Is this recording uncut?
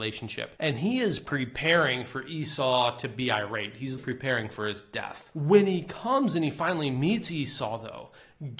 no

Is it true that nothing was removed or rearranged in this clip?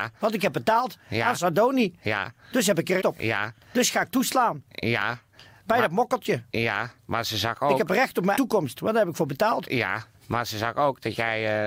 no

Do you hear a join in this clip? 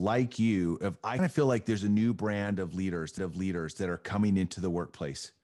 yes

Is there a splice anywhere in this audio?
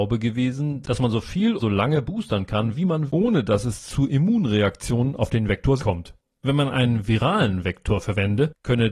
yes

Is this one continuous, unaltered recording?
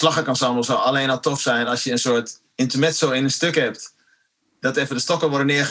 yes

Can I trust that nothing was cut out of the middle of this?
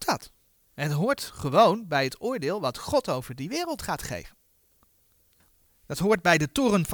yes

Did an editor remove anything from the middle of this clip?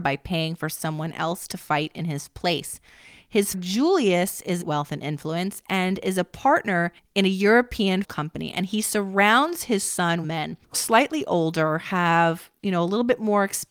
yes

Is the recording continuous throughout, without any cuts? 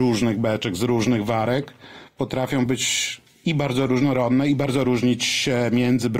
yes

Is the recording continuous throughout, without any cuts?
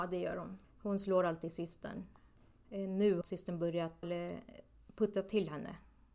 no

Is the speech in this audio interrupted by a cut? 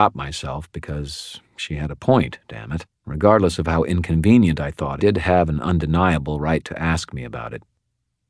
yes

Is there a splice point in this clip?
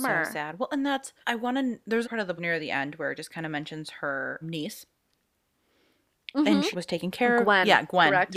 yes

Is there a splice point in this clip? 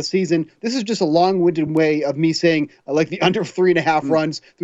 no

